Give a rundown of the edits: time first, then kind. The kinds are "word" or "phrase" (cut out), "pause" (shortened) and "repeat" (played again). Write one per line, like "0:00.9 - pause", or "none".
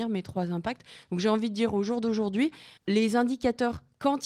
0:02.8 - pause